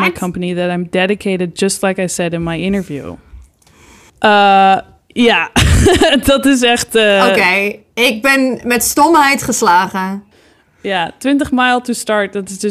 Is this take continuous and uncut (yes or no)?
yes